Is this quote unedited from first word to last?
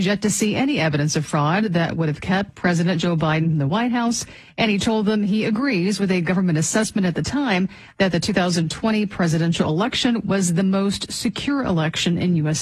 no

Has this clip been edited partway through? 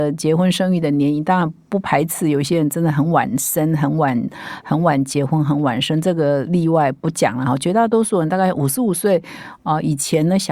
no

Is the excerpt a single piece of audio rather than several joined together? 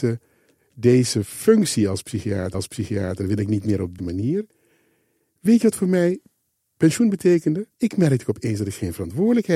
no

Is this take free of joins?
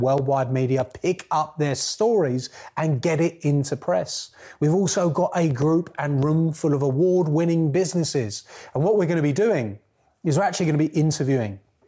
yes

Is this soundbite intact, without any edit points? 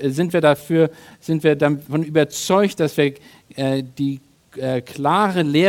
yes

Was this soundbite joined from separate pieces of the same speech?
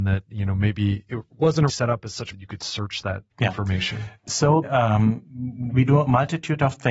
yes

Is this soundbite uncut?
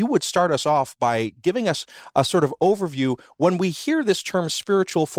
yes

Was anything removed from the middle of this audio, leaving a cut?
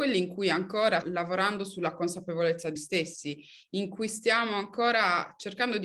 yes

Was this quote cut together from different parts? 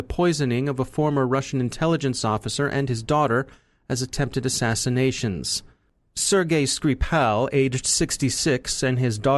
no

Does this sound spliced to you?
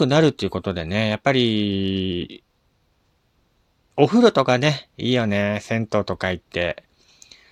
no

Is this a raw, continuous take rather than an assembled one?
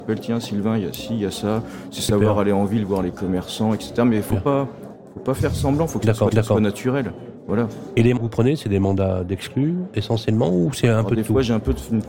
no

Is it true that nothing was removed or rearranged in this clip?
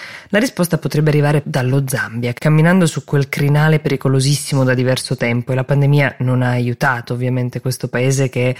no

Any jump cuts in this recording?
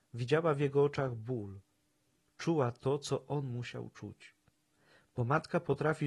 no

